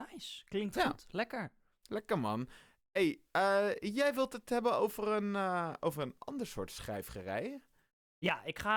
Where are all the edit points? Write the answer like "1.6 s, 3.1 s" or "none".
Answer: none